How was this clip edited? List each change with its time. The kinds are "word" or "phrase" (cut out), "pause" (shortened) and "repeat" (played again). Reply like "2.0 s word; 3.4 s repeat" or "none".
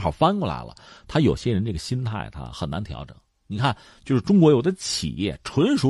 none